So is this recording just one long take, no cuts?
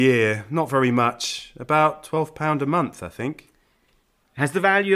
yes; 0 cuts

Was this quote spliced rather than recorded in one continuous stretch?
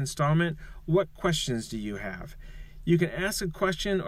no; 0 cuts

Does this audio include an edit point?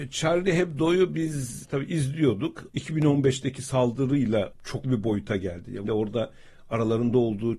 yes; 5 cuts; at 1.6 s, 2.7 s, 4.5 s, 4.8 s, 5.8 s

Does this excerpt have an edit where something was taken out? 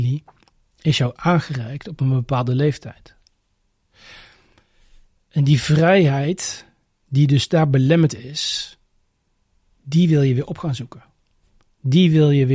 no; 0 cuts

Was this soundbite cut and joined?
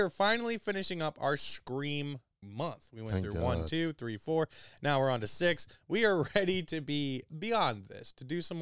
yes; 2 cuts; at 2.4 s, 7.3 s

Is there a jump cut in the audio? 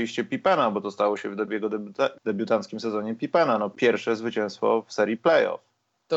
yes; 1 cut; at 2.2 s

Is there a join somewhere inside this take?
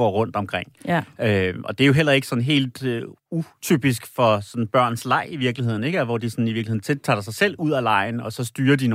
yes; 1 cut; at 3.2 s

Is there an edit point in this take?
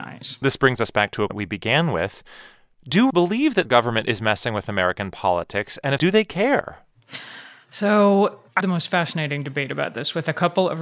yes; 5 cuts; at 1.3 s, 3.1 s, 3.6 s, 6.0 s, 8.6 s

